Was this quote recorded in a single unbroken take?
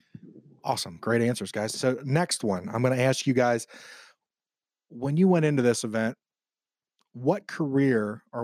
yes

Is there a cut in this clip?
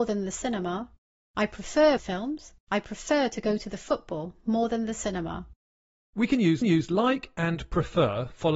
yes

